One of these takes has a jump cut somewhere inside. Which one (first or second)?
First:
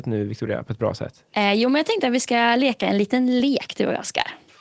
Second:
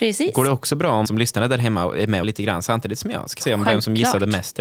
second